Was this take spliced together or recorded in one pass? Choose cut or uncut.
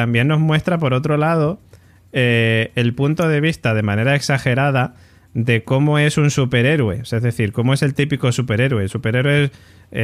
uncut